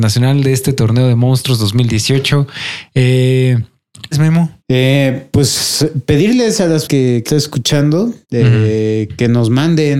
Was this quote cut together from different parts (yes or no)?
yes